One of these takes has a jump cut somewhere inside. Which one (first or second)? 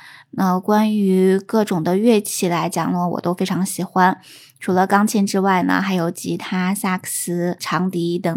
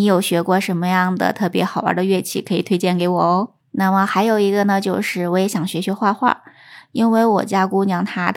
second